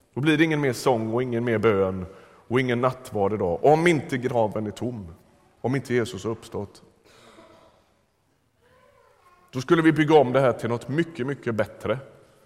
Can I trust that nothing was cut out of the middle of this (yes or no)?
yes